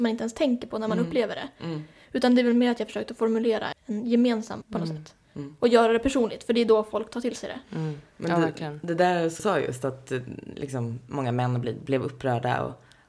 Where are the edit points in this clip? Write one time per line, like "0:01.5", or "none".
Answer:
0:03.7
0:04.6
0:09.4